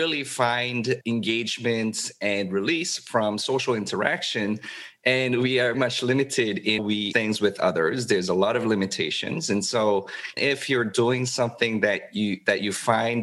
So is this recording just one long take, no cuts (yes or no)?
no